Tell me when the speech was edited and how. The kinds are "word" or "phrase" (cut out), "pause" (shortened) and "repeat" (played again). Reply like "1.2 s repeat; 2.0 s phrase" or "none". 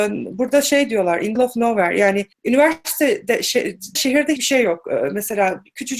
1.4 s word; 2.3 s pause; 4.0 s word; 4.4 s word